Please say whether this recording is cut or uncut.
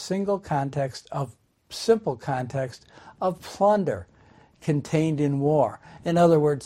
uncut